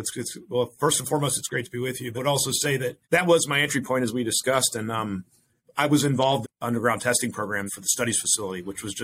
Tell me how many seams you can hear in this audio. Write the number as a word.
five